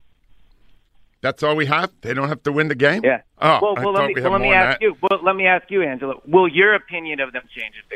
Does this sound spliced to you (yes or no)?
no